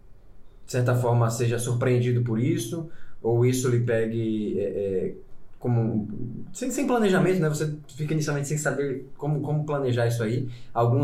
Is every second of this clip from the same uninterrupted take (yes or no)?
yes